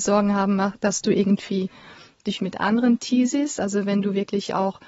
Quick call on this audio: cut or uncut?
cut